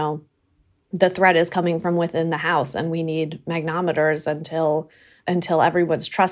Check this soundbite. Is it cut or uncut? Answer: uncut